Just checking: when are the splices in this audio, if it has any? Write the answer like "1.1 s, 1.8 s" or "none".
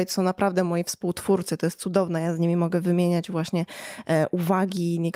none